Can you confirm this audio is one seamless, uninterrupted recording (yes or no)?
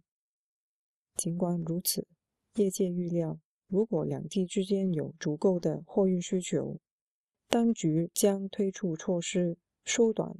yes